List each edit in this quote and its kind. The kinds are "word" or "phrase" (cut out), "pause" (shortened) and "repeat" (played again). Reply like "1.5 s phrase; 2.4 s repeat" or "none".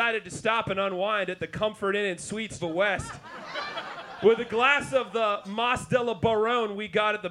2.6 s word